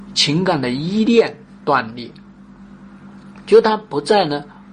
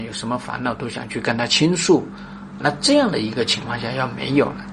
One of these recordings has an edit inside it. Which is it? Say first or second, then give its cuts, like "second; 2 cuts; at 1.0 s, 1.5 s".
second; 1 cut; at 2.6 s